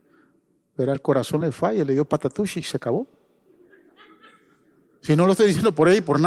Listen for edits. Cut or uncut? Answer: uncut